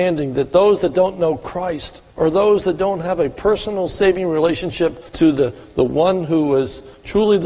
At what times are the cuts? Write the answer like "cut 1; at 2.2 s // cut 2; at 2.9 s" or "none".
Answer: cut 1; at 2.1 s // cut 2; at 5.1 s